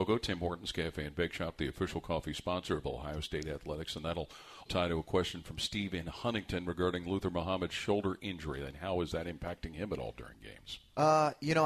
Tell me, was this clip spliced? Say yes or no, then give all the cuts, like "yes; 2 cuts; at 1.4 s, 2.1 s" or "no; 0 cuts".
yes; 1 cut; at 4.6 s